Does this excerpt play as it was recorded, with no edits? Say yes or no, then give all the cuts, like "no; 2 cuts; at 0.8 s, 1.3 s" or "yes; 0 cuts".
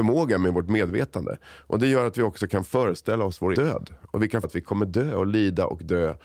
no; 2 cuts; at 3.5 s, 4.4 s